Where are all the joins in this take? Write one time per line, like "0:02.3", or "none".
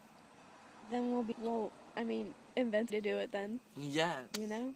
0:01.3
0:02.9

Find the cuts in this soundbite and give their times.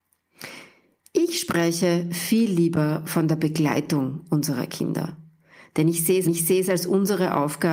0:06.2

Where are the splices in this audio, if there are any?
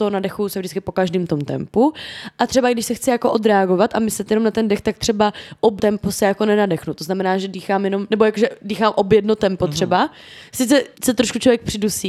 0:05.8
0:10.9

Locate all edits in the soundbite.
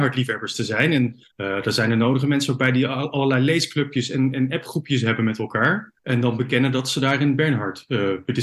0:01.3
0:06.0

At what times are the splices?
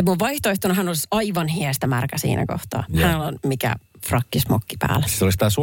none

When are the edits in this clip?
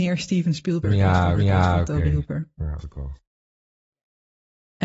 0:01.3
0:02.8

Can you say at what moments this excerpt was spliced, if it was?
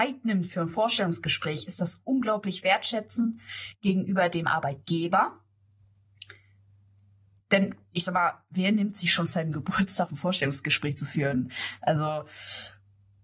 0:09.3

